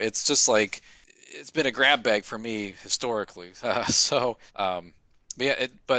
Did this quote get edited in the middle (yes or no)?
yes